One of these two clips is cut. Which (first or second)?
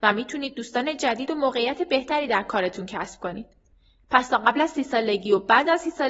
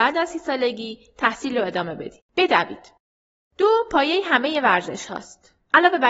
second